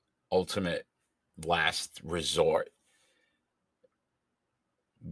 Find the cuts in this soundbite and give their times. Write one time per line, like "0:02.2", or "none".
none